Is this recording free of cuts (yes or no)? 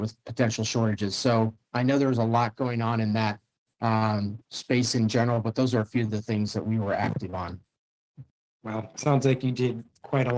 no